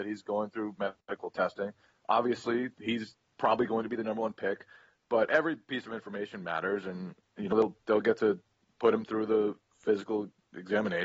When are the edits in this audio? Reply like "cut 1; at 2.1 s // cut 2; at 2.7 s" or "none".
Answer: none